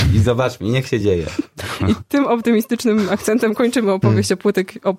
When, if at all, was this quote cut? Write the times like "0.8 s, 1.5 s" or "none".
none